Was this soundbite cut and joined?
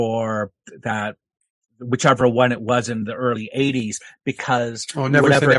no; 0 cuts

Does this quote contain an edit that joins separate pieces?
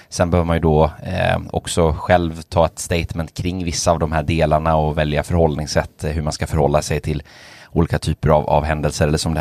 no; 0 cuts

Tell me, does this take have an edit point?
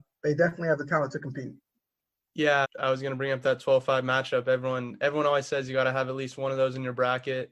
yes; 1 cut; at 2.6 s

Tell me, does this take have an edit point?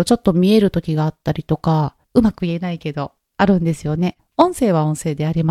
yes; 1 cut; at 2.0 s

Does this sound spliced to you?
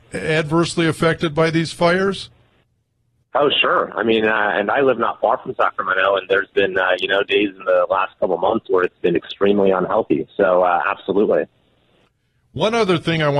no; 0 cuts

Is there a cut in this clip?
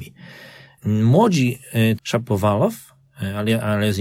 yes; 1 cut; at 2.0 s

